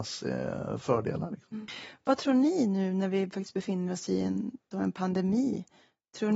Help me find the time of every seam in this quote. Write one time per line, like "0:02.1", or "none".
0:04.7